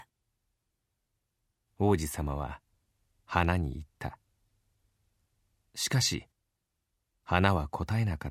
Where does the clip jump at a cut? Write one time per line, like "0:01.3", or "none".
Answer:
none